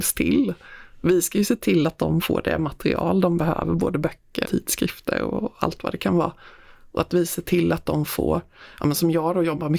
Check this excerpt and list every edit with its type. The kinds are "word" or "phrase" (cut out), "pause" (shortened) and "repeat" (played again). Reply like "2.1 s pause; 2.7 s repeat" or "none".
4.4 s word